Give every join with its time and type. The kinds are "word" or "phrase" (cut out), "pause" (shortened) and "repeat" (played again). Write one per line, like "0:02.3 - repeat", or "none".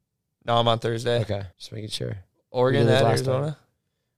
0:01.5 - pause